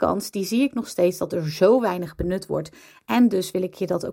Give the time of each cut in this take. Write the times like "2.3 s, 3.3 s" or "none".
none